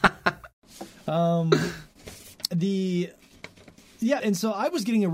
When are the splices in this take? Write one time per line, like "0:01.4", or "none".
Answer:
0:04.2